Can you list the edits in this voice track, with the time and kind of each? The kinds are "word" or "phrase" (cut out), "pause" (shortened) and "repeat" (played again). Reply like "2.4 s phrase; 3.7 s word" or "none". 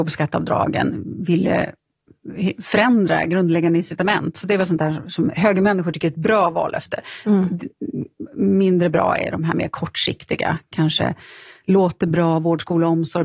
none